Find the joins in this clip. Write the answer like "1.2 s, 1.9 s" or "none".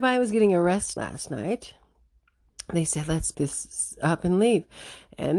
1.0 s, 3.3 s

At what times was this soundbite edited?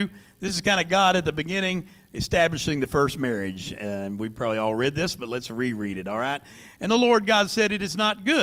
none

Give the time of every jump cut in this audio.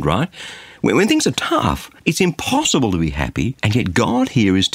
2.0 s, 3.6 s

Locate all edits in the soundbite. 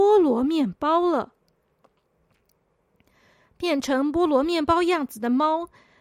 none

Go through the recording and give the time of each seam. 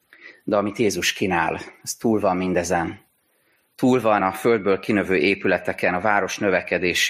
4.2 s

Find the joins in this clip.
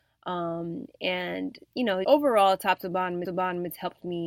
2.0 s, 3.2 s

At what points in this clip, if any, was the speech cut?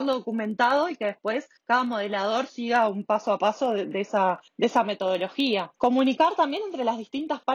1.6 s, 4.5 s, 5.7 s

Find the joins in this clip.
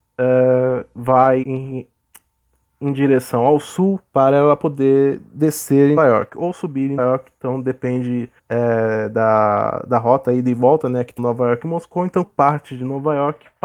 1.4 s, 4.1 s, 6.0 s, 7.0 s, 8.4 s, 11.2 s, 12.2 s

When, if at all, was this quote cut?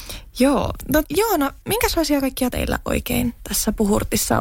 1.0 s, 1.6 s, 2.5 s

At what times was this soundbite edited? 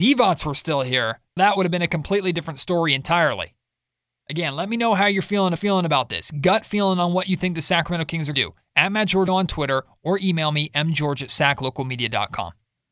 1.4 s, 5.6 s, 8.3 s, 9.3 s

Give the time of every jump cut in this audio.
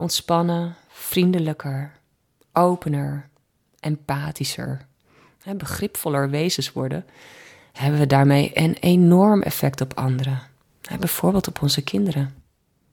none

